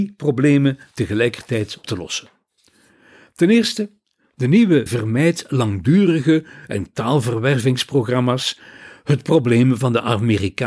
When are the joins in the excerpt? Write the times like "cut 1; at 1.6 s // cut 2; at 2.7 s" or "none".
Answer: cut 1; at 1.8 s // cut 2; at 4.9 s // cut 3; at 6.9 s